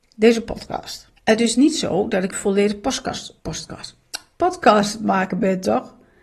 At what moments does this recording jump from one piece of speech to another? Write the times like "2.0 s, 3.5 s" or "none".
1.2 s, 2.3 s, 3.4 s